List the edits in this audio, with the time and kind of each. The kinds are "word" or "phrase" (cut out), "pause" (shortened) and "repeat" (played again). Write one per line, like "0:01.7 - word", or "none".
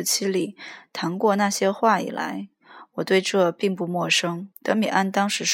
0:04.5 - pause